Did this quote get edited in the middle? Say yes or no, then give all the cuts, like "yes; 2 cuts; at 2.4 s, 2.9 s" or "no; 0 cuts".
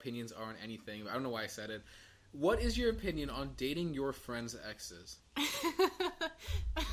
yes; 1 cut; at 5.2 s